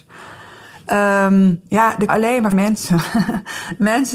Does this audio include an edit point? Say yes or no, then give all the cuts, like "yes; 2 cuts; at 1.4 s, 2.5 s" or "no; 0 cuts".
yes; 2 cuts; at 2.1 s, 2.5 s